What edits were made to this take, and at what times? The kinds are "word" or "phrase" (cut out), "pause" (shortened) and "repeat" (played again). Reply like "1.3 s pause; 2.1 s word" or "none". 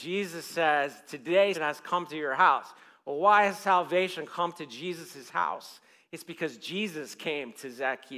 1.5 s word